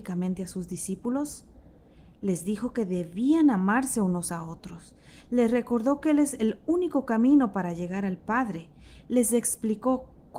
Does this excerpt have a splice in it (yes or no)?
no